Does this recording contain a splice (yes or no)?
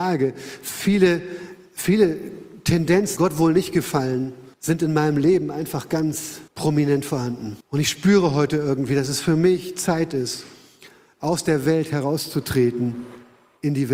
yes